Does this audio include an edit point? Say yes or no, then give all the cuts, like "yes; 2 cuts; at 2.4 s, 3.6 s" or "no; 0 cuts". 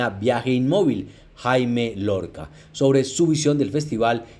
no; 0 cuts